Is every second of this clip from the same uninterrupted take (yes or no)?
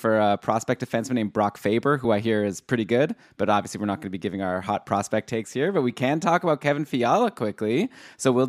yes